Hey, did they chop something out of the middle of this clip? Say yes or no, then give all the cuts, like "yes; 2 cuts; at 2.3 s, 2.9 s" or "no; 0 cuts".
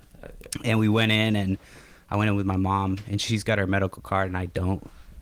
no; 0 cuts